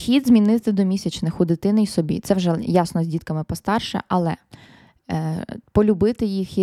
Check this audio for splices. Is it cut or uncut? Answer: uncut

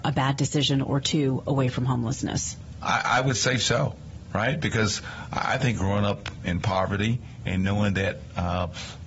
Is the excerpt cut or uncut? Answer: cut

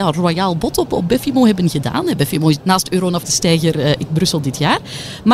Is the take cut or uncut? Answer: cut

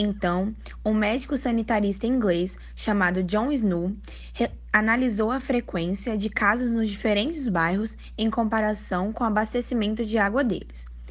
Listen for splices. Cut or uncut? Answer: uncut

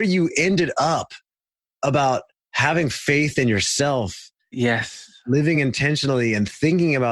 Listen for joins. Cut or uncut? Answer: uncut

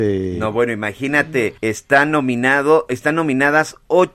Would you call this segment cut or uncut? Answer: cut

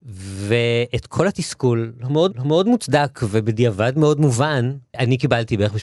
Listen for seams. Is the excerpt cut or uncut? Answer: cut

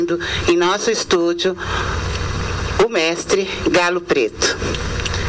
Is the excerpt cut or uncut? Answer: uncut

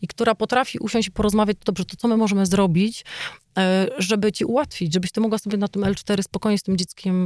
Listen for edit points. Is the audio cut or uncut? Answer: uncut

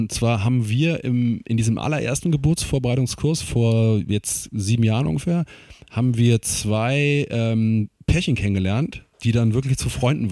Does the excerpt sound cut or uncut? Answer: cut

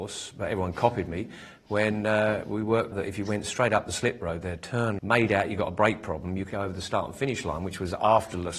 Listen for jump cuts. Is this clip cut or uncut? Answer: cut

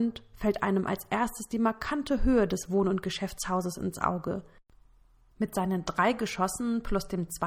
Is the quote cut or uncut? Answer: uncut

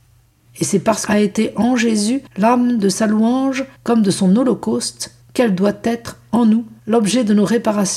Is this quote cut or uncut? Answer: cut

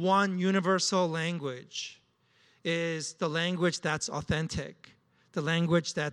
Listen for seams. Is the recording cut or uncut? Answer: uncut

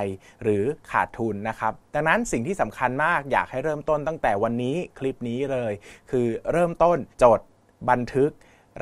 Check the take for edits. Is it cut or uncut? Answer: cut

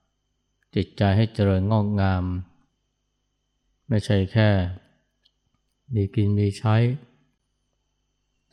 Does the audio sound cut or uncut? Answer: uncut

